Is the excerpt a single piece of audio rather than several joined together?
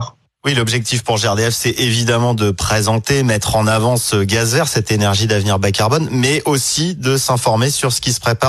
yes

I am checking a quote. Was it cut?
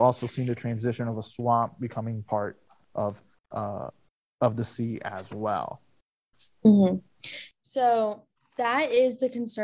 no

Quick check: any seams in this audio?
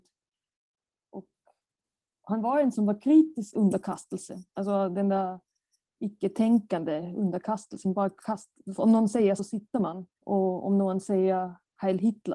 yes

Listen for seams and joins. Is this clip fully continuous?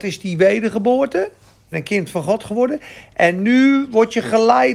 no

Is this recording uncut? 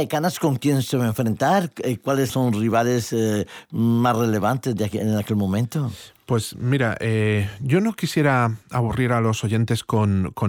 no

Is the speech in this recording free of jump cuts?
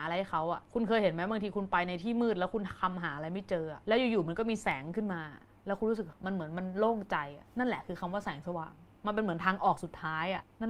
yes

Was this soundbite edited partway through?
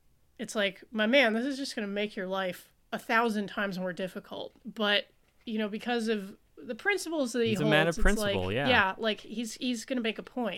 yes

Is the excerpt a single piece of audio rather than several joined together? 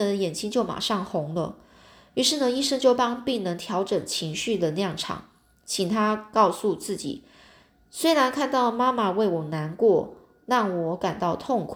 yes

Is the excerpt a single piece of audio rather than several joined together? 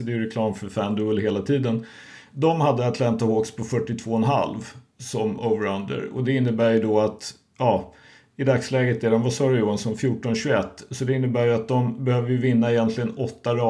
yes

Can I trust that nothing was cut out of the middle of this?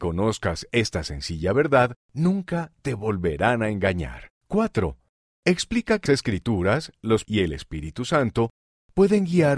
no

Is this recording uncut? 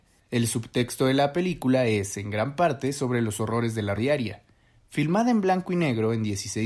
no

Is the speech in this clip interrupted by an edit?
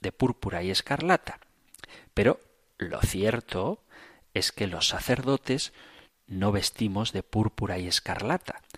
no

